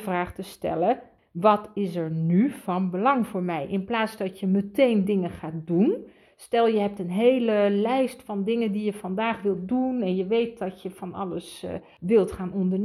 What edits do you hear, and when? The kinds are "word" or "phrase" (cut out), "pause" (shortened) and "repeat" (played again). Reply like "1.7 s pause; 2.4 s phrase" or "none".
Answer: none

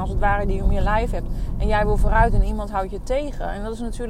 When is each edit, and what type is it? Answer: none

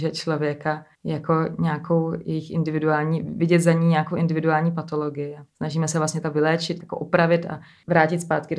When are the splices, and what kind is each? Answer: 0.9 s pause; 5.5 s pause; 6.2 s phrase; 6.8 s word

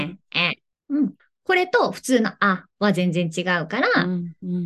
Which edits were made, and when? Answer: 1.2 s pause; 2.7 s pause

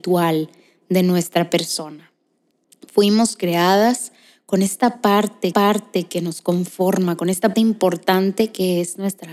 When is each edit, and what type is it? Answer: 5.5 s repeat; 7.5 s word

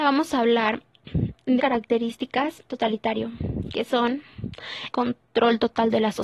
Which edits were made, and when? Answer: 1.6 s word; 2.7 s phrase; 4.9 s word

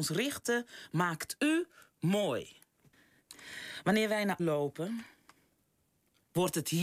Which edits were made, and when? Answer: 4.4 s word

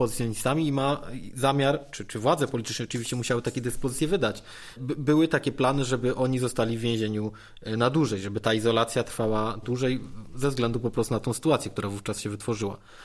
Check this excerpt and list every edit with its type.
none

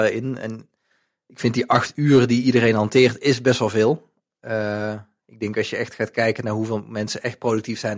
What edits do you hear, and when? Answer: none

